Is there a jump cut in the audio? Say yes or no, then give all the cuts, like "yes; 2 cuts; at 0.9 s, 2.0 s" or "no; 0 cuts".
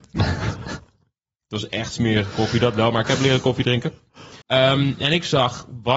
yes; 1 cut; at 4.4 s